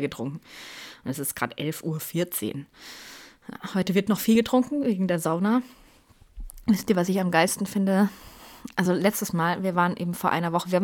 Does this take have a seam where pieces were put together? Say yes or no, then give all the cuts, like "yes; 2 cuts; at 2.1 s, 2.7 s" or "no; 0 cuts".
no; 0 cuts